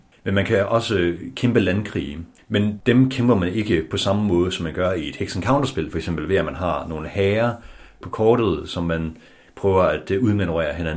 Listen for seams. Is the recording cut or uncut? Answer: cut